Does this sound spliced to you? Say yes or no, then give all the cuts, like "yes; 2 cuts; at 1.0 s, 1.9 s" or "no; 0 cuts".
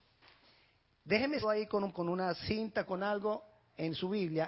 yes; 2 cuts; at 1.4 s, 1.9 s